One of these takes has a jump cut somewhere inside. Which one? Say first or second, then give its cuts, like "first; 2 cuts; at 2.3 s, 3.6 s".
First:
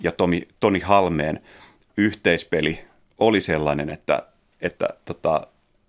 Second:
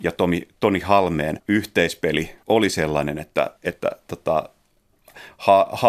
second; 3 cuts; at 1.4 s, 2.4 s, 3.6 s